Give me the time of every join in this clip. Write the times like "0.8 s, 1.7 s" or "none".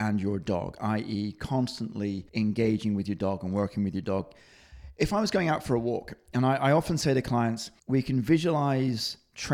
2.3 s, 7.8 s

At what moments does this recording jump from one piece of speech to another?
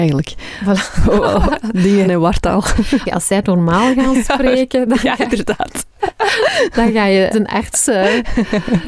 2.0 s, 3.1 s, 7.3 s

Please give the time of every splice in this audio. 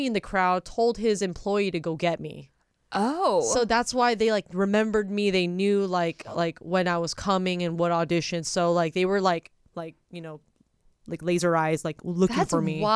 none

